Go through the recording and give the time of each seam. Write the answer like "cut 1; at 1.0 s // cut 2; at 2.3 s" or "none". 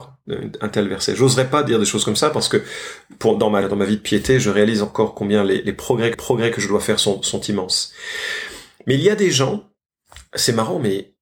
cut 1; at 3.6 s // cut 2; at 6.1 s